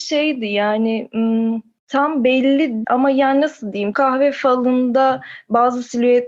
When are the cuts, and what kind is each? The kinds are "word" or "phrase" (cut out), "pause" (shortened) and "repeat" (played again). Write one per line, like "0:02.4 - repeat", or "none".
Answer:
0:02.8 - word
0:03.9 - word

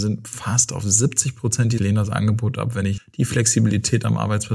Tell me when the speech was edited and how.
0:01.8 - phrase
0:03.0 - word

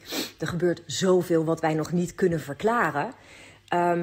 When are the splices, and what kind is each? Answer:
none

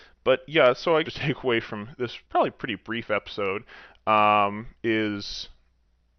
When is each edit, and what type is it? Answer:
0:01.0 - phrase
0:02.2 - pause

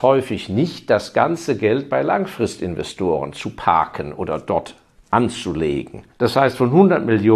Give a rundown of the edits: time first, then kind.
0:06.1 - pause

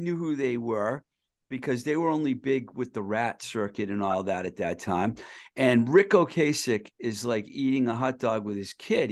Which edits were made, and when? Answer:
none

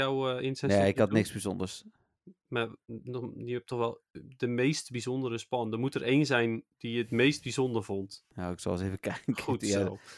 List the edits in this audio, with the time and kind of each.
0:08.3 - pause

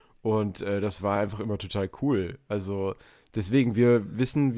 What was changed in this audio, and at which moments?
none

